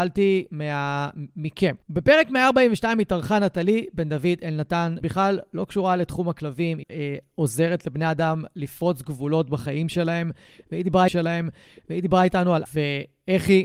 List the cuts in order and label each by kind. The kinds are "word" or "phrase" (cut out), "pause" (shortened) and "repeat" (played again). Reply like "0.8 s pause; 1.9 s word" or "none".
1.8 s pause; 5.0 s word; 6.8 s word; 11.1 s repeat; 12.7 s word